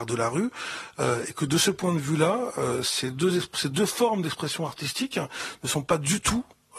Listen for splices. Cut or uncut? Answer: uncut